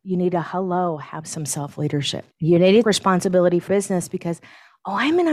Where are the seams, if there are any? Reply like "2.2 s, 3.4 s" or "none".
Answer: 2.3 s, 2.8 s, 3.7 s